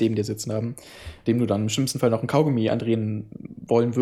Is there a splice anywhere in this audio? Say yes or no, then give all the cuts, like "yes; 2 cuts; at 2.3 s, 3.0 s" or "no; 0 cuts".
yes; 1 cut; at 1.3 s